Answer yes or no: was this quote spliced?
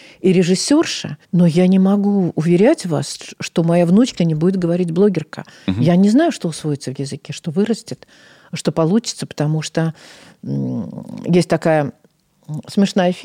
yes